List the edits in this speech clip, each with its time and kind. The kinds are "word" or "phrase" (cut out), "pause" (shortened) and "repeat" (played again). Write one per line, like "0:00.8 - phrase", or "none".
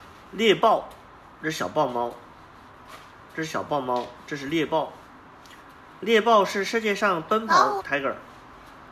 0:07.8 - word